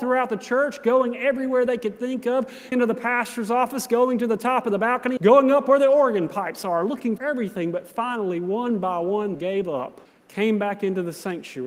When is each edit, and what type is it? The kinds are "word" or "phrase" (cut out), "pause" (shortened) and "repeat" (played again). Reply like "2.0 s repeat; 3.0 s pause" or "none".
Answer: 2.7 s word; 5.2 s word; 7.2 s word; 9.3 s word; 10.1 s pause